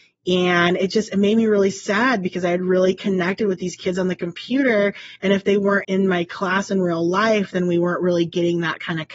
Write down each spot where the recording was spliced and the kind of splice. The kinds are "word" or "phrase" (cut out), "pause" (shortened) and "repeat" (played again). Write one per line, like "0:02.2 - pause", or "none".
0:05.8 - word